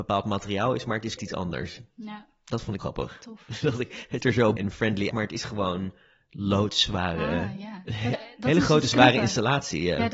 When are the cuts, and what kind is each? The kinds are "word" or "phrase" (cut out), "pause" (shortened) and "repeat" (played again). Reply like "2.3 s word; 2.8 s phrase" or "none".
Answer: 1.2 s word; 2.8 s word; 4.2 s word; 4.6 s word; 5.1 s word; 8.1 s word